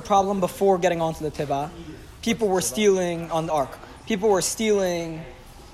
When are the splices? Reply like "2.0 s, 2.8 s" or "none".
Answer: 3.5 s